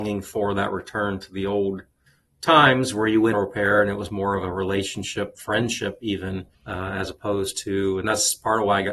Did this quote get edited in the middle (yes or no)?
yes